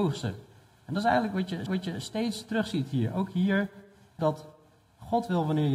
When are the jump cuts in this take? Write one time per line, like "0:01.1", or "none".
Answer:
0:01.7
0:04.2